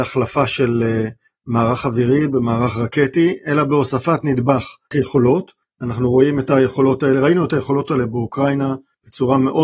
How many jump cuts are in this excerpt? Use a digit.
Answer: 1